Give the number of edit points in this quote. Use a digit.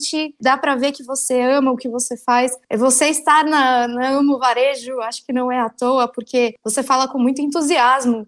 0